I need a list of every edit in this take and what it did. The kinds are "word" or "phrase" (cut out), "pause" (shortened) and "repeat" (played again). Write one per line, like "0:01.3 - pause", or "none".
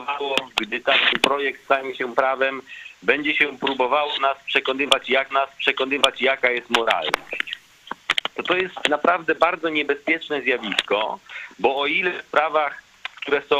0:01.1 - phrase
0:05.3 - repeat
0:12.3 - word